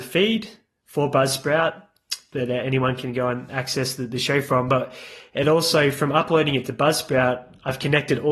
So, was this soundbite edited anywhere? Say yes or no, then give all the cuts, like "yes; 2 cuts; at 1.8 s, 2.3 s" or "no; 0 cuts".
no; 0 cuts